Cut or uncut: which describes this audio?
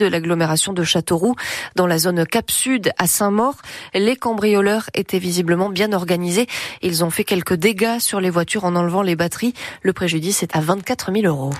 cut